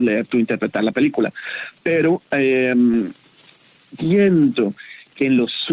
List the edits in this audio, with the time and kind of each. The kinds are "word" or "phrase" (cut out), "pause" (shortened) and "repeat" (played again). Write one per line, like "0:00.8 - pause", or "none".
0:04.0 - word

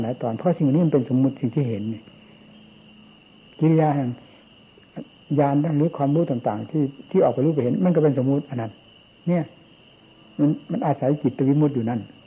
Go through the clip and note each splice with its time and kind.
none

